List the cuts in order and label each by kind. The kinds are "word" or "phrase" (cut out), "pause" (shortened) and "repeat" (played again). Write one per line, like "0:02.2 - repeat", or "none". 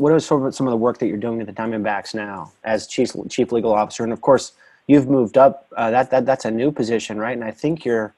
0:02.6 - pause

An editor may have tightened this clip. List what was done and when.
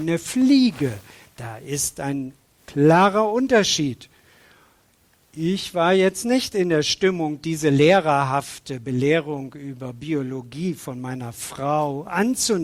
none

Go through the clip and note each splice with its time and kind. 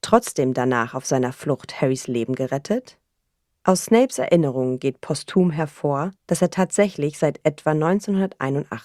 0:03.2 - pause
0:06.2 - pause

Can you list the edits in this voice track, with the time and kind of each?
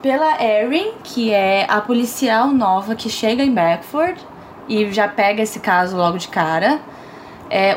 none

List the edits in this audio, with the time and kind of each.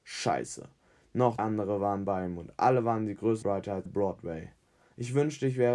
0:01.4 - word
0:03.4 - word
0:03.9 - word

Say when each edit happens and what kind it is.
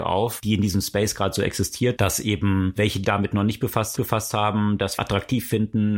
0:02.0 - word
0:03.0 - word
0:04.0 - repeat
0:05.0 - phrase

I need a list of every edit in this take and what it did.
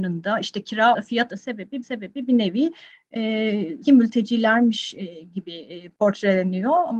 0:00.9 - word
0:01.3 - word
0:01.8 - repeat
0:03.8 - word

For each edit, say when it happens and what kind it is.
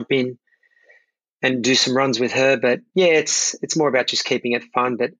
none

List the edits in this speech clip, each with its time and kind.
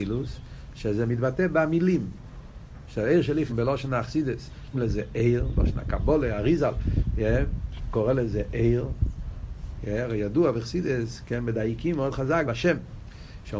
0:03.5 - word
0:04.7 - word
0:12.4 - word

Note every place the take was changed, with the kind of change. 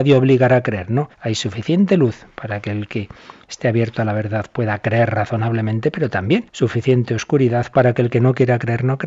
0:01.1 - pause
0:06.5 - pause

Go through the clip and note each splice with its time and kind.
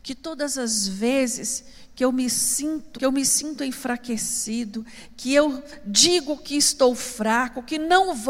0:03.0 - word

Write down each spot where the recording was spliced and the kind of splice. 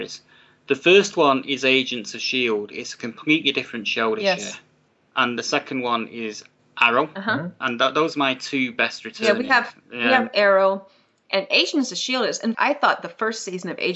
0:07.6 - word
0:12.5 - word

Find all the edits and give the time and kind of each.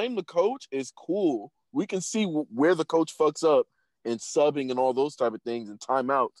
none

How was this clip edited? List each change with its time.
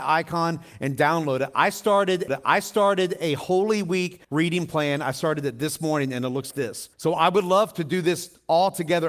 0:02.3 - repeat
0:04.2 - pause
0:06.5 - word
0:06.9 - pause

